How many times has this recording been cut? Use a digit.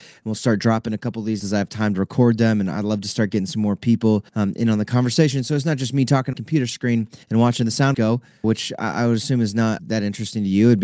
7